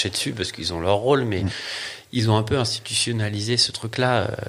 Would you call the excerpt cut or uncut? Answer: uncut